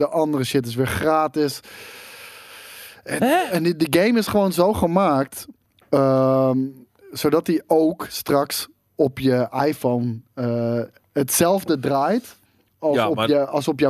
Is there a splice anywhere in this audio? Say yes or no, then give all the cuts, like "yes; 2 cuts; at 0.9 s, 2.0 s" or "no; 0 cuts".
no; 0 cuts